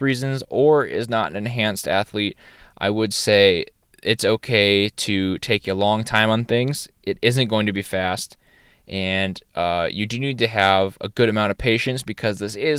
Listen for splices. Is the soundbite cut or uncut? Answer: cut